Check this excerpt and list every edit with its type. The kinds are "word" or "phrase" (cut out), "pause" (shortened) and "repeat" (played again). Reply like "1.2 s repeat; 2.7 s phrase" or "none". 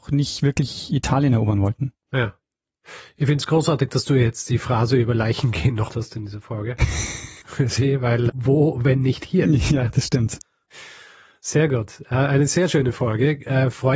5.9 s word; 7.4 s word; 8.3 s word